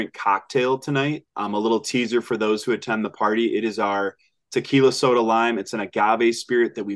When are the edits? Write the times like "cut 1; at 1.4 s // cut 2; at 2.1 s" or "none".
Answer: cut 1; at 1.3 s